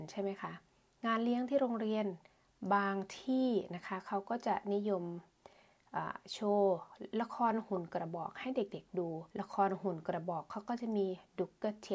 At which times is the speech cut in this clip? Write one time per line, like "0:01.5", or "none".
0:07.1
0:09.3